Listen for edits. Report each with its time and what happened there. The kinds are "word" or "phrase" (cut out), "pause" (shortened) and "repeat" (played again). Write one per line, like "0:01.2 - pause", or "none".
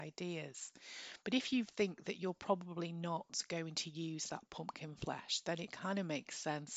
none